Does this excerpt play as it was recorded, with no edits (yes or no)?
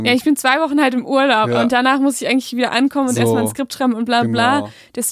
yes